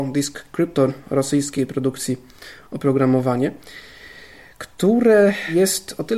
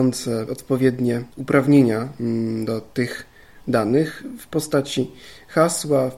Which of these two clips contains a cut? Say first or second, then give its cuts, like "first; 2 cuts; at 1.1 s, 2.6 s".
second; 1 cut; at 1.3 s